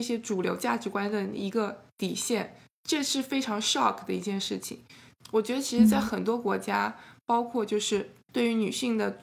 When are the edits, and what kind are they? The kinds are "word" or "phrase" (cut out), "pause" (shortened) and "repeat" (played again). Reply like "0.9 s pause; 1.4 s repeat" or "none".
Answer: none